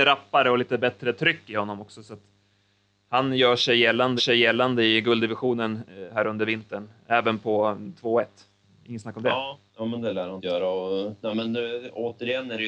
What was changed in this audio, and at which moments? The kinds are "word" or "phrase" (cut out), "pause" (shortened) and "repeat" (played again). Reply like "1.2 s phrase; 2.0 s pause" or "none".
4.2 s repeat; 9.7 s pause; 10.4 s word